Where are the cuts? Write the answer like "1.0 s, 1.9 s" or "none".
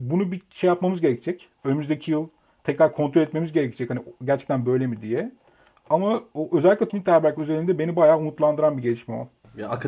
6.9 s